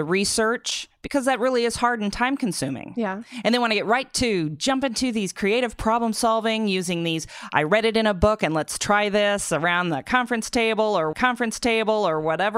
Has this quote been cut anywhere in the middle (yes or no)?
yes